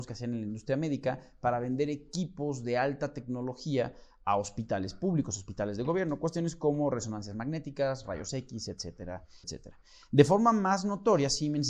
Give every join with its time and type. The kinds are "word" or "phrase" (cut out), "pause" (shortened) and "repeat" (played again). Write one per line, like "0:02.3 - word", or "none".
0:09.4 - word